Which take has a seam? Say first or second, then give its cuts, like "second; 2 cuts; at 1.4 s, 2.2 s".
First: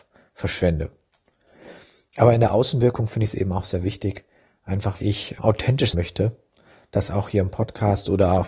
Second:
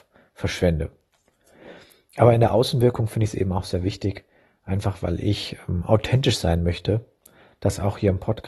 first; 3 cuts; at 5.0 s, 5.4 s, 5.9 s